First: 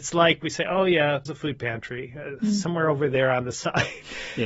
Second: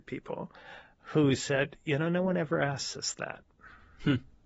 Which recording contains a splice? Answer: first; 1 cut; at 1.3 s

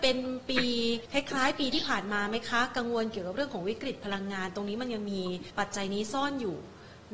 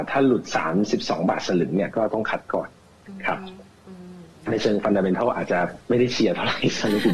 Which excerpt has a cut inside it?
first; 2 cuts; at 1.1 s, 5.5 s

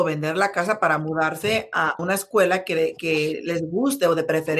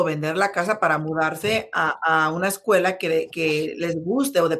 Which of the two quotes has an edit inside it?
first; 1 cut; at 2.0 s

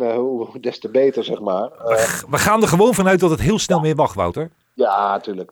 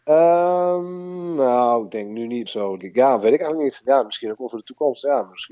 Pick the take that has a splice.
second; 2 cuts; at 2.5 s, 2.8 s

